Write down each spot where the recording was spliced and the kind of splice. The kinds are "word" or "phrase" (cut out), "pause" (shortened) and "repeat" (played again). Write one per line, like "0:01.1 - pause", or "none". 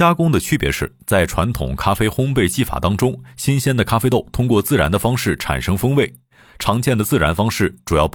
none